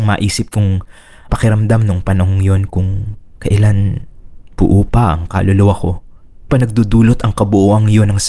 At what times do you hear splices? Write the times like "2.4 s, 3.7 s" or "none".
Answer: 1.3 s, 4.5 s, 6.5 s